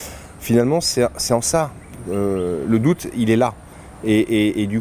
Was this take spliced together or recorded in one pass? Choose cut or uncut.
uncut